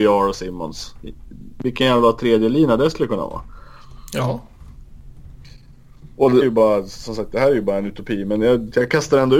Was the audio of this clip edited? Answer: yes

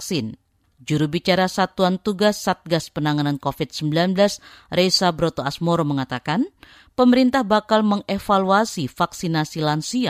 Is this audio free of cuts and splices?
yes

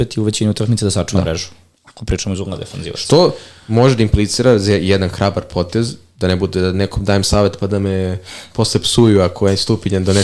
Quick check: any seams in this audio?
no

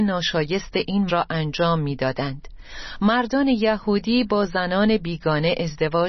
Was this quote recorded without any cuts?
no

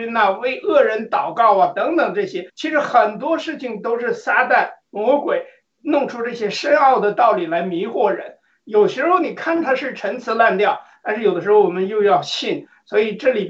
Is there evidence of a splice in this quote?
yes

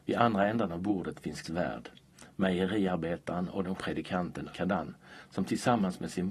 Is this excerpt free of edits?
no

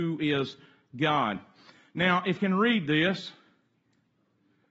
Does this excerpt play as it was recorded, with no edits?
no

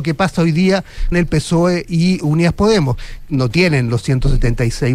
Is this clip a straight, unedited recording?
no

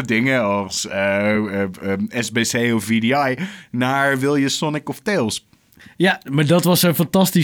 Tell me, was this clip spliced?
no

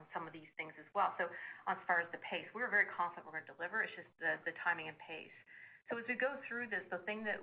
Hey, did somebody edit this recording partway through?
no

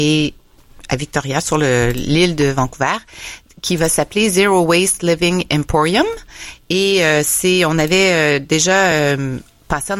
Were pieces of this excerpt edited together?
no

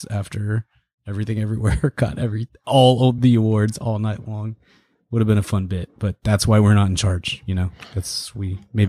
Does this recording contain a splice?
no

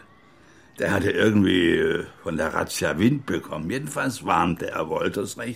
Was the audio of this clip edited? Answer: no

